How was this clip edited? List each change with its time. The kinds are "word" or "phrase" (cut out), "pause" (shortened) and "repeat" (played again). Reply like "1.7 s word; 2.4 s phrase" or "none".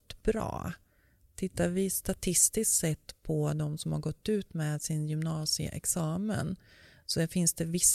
none